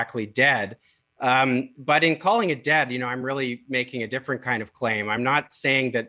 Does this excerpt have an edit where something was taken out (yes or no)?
no